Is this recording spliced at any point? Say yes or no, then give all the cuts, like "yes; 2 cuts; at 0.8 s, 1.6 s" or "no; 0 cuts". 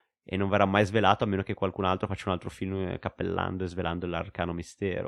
no; 0 cuts